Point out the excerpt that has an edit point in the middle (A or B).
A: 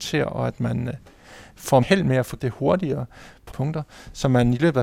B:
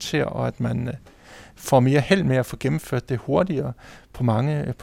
A